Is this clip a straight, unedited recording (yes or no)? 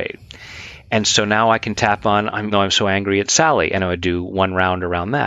no